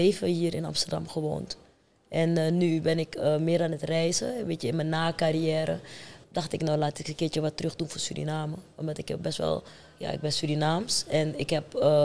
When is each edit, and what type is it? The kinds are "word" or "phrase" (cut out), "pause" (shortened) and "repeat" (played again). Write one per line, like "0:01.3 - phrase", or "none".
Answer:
0:06.2 - word